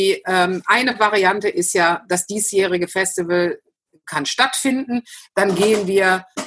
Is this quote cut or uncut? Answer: uncut